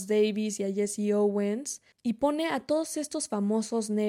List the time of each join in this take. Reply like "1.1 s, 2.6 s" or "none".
1.9 s

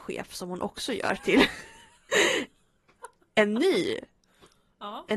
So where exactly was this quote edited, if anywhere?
none

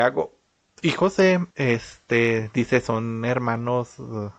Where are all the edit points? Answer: 1.5 s

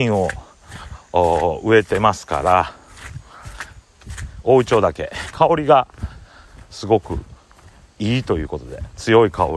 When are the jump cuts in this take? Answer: none

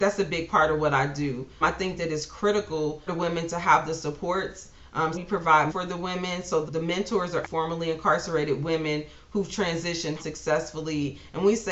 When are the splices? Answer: 1.6 s, 3.1 s, 5.1 s, 5.7 s, 6.7 s, 7.4 s, 10.2 s

